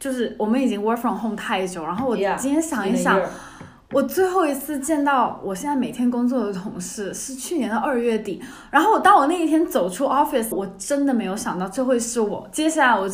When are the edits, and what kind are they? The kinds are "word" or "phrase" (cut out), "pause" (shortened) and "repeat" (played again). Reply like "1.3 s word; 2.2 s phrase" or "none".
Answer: 10.5 s phrase